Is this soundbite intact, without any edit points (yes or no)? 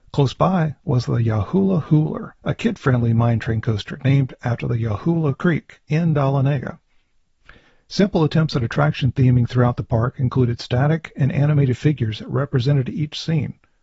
no